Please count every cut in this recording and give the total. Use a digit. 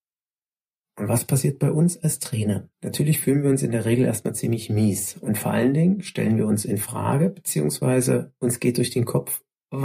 1